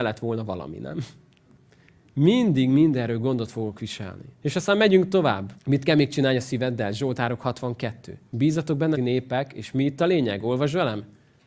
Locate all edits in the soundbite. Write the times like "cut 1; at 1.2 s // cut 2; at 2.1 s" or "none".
cut 1; at 4.3 s // cut 2; at 5.6 s // cut 3; at 8.3 s // cut 4; at 8.9 s